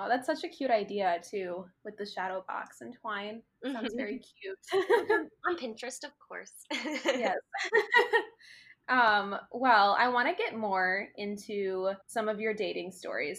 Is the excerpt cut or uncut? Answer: cut